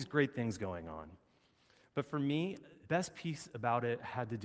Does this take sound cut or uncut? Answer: cut